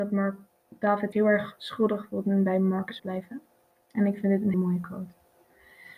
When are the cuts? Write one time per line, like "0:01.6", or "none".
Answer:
0:01.1
0:03.0
0:04.5

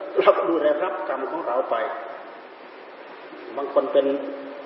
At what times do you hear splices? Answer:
none

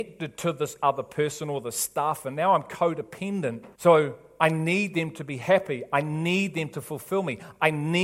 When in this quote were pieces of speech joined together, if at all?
0:03.7

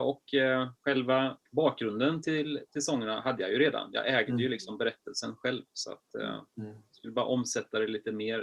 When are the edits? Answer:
0:01.5

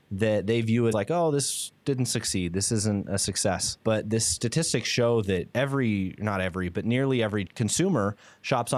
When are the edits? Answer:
0:00.9
0:05.5

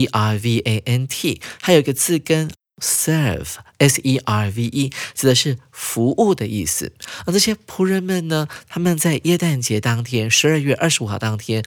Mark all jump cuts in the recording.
none

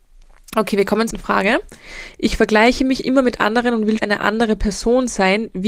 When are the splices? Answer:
0:01.1
0:04.0

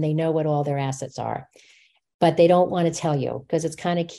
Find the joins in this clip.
none

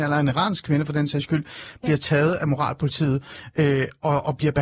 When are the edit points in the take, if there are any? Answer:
none

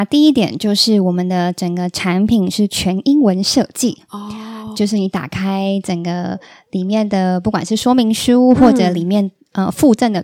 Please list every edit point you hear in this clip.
0:04.7

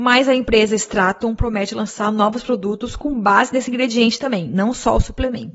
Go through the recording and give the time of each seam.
none

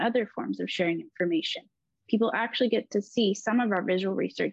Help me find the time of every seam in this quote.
none

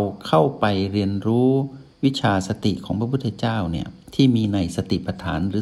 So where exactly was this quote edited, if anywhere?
0:01.9
0:04.0

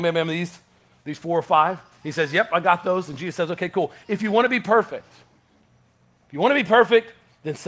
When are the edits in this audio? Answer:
none

